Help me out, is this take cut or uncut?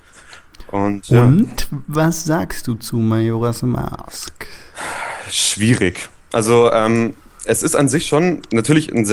uncut